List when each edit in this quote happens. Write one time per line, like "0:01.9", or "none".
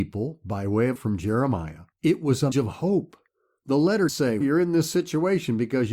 0:01.0
0:01.9
0:02.5
0:04.1
0:04.4